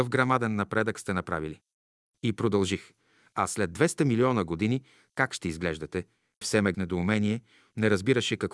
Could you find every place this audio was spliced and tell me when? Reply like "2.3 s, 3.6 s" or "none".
6.4 s, 6.7 s